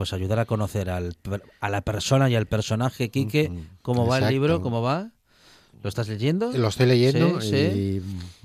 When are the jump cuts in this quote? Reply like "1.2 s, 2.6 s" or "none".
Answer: none